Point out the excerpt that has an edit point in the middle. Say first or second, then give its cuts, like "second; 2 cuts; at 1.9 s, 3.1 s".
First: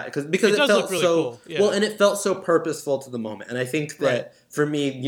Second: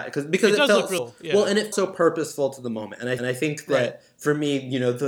second; 3 cuts; at 1.0 s, 1.7 s, 3.2 s